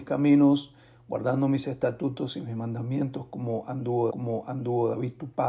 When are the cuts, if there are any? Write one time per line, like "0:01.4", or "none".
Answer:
0:04.1